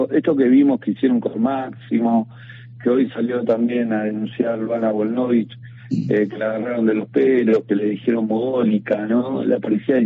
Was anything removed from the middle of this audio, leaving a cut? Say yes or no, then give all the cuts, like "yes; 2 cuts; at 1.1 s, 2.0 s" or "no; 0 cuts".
no; 0 cuts